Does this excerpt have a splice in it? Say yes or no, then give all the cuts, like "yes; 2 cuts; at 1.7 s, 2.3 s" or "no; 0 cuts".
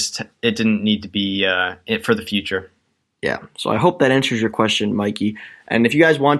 no; 0 cuts